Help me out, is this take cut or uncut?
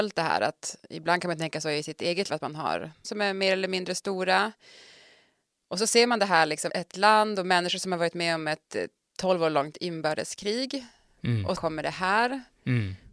cut